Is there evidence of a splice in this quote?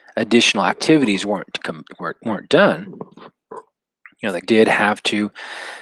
yes; 2 cuts; at 3.1 s, 4.4 s

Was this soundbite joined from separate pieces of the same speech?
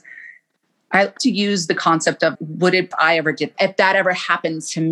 yes; 4 cuts; at 1.2 s, 2.3 s, 2.9 s, 3.5 s

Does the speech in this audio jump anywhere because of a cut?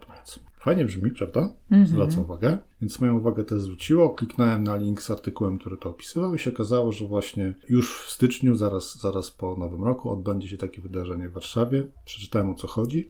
no; 0 cuts

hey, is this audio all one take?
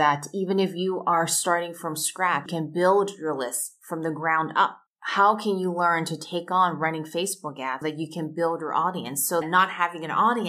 no; 4 cuts; at 2.5 s, 4.9 s, 7.8 s, 9.4 s

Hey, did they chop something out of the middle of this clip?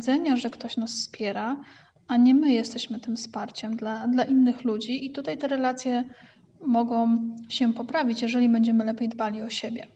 no; 0 cuts

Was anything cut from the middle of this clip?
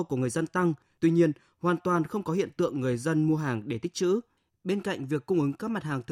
no; 0 cuts

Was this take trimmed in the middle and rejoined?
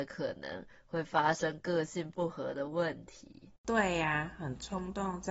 yes; 1 cut; at 3.6 s

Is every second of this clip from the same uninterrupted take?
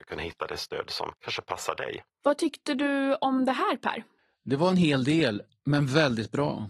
no; 3 cuts; at 1.2 s, 2.1 s, 4.2 s

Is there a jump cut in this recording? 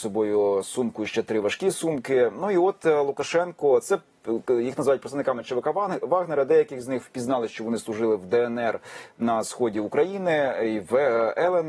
no; 0 cuts

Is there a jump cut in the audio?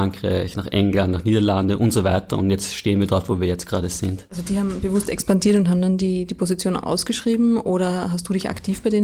no; 0 cuts

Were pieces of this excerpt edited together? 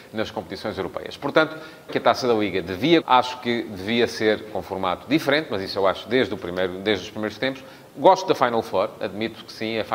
yes; 2 cuts; at 1.9 s, 3.0 s

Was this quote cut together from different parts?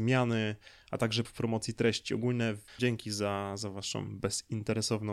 yes; 2 cuts; at 1.2 s, 2.8 s

